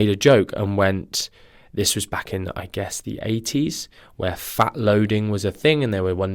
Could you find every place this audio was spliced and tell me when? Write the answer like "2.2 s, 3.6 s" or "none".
none